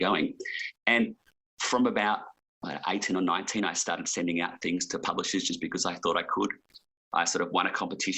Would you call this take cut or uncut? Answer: uncut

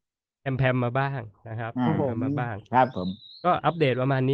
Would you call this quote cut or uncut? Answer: uncut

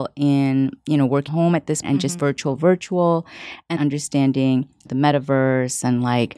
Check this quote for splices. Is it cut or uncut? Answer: cut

